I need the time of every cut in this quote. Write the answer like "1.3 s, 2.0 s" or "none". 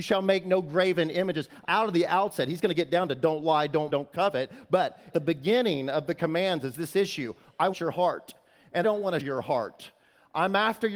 1.6 s, 3.9 s, 5.1 s, 7.7 s, 8.8 s, 9.2 s